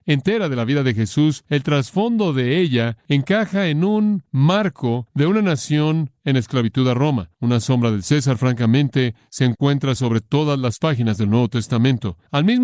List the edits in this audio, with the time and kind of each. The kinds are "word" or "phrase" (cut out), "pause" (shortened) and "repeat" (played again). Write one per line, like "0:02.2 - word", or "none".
none